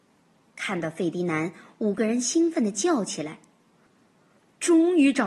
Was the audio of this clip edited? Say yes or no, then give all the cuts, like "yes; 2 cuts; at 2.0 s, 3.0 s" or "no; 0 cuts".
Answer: no; 0 cuts